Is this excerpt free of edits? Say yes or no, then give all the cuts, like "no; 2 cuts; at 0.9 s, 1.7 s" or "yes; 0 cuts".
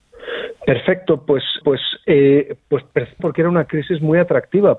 no; 2 cuts; at 1.6 s, 3.2 s